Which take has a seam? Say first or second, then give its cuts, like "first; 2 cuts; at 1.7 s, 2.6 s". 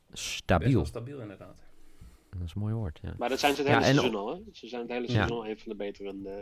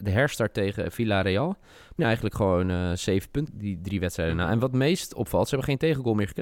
second; 2 cuts; at 2.0 s, 3.5 s